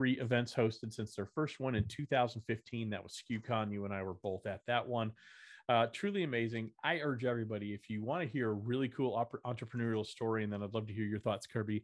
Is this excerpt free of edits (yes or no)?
yes